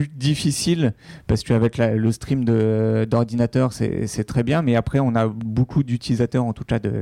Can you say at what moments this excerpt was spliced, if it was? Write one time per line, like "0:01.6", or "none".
none